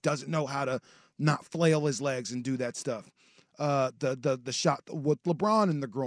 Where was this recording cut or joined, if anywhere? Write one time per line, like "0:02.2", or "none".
none